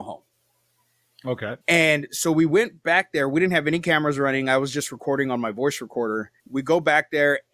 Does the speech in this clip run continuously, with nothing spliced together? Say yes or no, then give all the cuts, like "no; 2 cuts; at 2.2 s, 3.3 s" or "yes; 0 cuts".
no; 2 cuts; at 1.6 s, 6.4 s